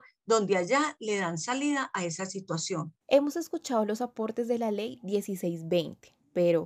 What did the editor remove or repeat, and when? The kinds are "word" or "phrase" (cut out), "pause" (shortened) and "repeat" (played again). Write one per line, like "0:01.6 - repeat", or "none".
0:03.0 - pause